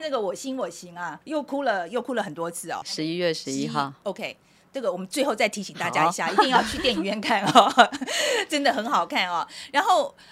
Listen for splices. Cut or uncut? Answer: cut